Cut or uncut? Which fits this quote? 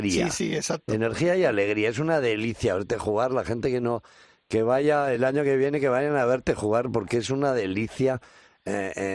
uncut